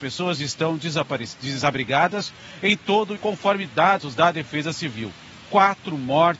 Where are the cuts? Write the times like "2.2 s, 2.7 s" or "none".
3.2 s